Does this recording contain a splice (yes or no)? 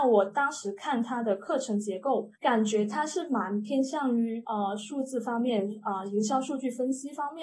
yes